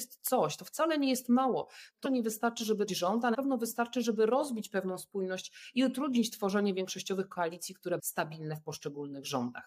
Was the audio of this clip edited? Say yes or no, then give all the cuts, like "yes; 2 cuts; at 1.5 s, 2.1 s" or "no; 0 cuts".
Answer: yes; 4 cuts; at 2.0 s, 2.9 s, 3.3 s, 8.0 s